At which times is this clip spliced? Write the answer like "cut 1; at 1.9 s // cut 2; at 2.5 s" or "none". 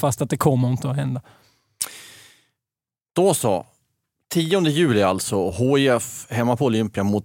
none